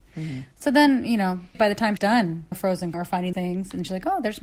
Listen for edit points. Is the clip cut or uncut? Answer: cut